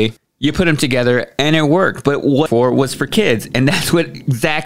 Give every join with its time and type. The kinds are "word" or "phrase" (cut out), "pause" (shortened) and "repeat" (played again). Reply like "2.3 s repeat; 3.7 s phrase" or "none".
2.5 s phrase